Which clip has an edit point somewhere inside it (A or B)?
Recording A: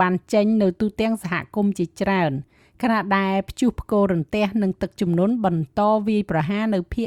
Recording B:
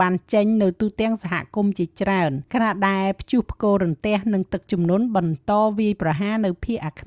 B